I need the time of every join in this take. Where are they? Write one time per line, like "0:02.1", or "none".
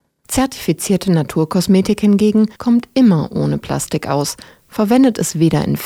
0:02.5